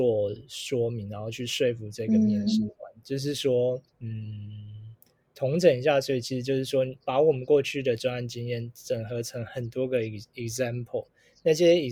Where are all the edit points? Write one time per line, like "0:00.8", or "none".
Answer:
0:03.9

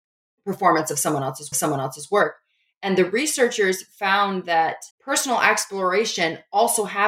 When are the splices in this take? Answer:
0:01.5
0:04.9

